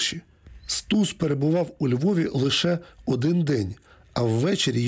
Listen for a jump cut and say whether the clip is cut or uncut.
uncut